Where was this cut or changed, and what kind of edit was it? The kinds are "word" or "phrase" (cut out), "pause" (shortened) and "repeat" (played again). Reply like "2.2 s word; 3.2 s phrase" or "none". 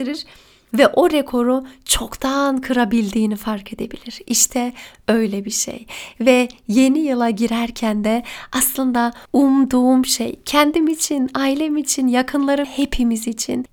9.2 s pause; 12.6 s word